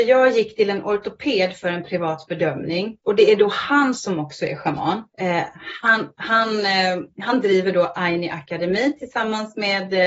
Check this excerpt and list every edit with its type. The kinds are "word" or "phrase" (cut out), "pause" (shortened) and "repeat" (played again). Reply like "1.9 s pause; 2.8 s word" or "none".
3.0 s pause; 5.1 s pause